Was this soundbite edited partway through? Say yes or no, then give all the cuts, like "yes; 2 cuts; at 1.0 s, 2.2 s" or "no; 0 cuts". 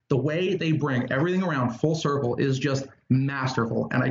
no; 0 cuts